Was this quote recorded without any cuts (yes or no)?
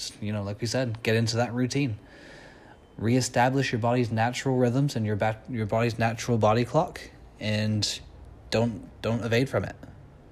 yes